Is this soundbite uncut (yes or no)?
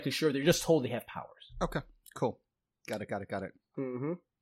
yes